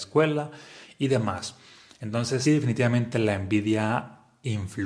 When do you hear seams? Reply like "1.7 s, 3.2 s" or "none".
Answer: 2.5 s